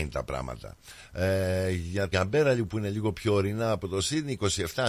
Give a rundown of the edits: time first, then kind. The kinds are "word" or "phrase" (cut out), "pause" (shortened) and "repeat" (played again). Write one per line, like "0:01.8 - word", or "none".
0:02.1 - word